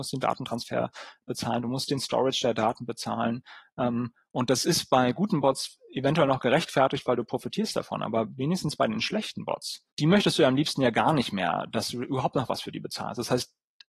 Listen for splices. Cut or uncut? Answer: cut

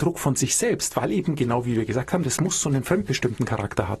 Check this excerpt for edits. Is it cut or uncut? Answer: uncut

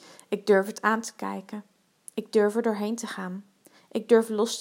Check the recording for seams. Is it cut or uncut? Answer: uncut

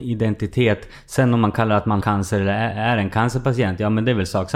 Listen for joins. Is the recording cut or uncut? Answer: cut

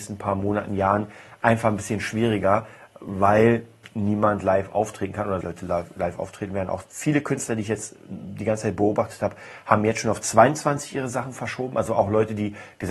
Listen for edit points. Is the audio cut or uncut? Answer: cut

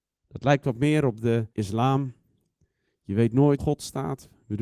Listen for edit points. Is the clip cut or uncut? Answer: cut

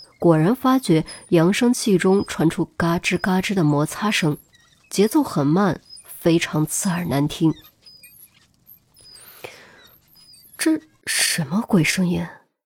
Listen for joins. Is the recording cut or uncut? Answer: uncut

